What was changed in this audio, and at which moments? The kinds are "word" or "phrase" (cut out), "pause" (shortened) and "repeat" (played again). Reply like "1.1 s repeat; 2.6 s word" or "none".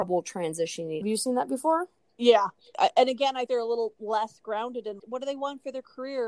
1.0 s phrase; 2.0 s pause; 3.5 s word; 5.0 s word